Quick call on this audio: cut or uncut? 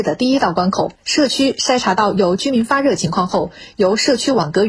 cut